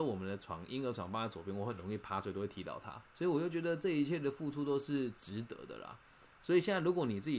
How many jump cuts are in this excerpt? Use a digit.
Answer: 1